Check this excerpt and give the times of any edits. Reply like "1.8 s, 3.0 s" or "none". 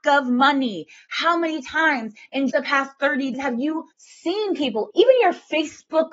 2.5 s, 3.3 s, 3.9 s, 4.9 s